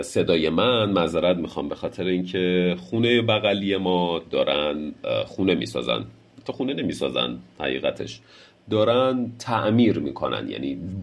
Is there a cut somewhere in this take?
no; 0 cuts

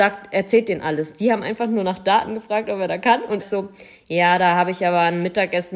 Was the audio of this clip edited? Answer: yes; 1 cut; at 3.4 s

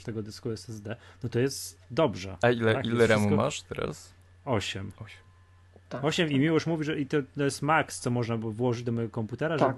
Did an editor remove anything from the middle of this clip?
no; 0 cuts

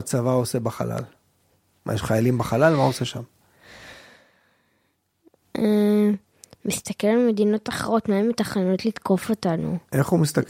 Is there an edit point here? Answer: no; 0 cuts

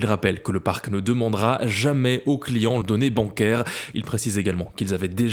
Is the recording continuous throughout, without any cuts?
no; 1 cut; at 2.8 s

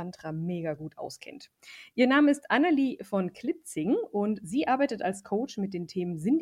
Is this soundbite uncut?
yes; 0 cuts

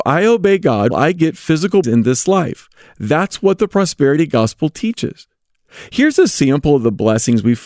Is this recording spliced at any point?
yes; 2 cuts; at 0.9 s, 1.8 s

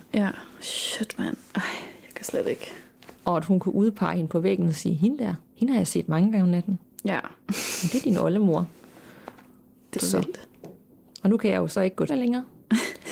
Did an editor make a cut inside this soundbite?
yes; 5 cuts; at 3.2 s, 5.5 s, 7.4 s, 9.9 s, 12.1 s

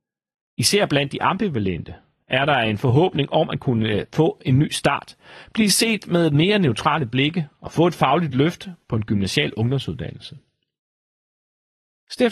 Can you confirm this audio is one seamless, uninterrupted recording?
yes; 0 cuts

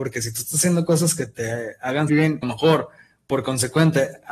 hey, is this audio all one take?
no; 2 cuts; at 2.1 s, 2.4 s

